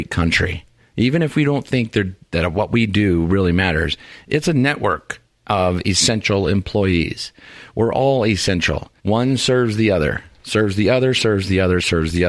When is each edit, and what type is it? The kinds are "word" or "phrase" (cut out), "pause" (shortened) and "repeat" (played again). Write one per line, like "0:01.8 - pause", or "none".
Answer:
0:09.0 - pause